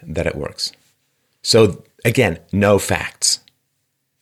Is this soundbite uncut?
yes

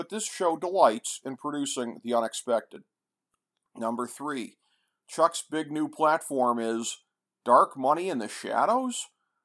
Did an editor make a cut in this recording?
no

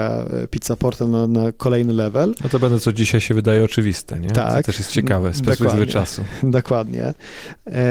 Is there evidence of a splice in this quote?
no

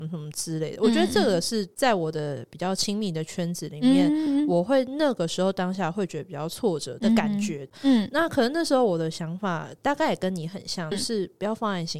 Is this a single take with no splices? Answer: no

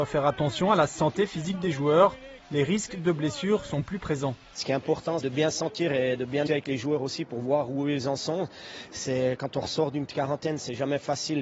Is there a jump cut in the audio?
yes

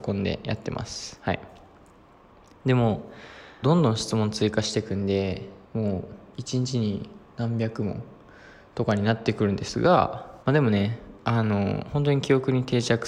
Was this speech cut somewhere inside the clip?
yes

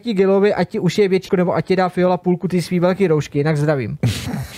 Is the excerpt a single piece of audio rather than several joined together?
no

